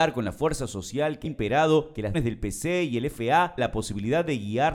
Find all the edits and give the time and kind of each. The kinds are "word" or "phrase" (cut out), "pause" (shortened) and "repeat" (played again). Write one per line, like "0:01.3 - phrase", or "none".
0:01.3 - word
0:02.1 - word
0:03.6 - word